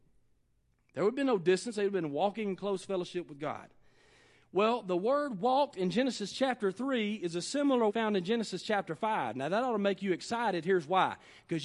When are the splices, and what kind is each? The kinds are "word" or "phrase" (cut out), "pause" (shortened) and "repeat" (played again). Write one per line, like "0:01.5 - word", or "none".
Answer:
0:07.9 - word